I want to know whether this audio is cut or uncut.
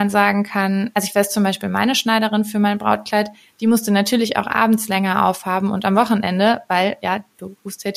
uncut